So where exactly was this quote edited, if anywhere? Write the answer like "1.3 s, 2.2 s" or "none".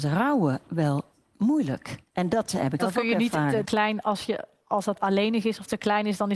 2.1 s, 2.8 s, 3.6 s, 5.0 s